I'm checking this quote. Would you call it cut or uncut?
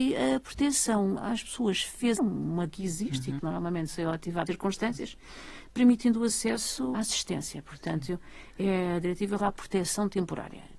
cut